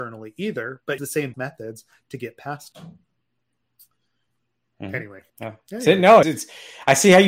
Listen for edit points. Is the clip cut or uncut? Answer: cut